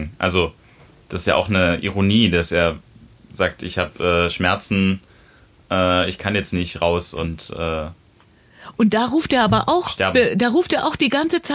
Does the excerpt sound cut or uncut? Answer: uncut